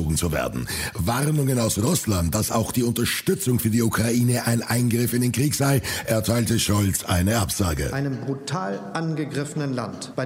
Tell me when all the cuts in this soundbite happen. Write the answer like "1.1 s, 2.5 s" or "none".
none